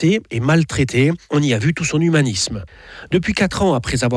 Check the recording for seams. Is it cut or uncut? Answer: uncut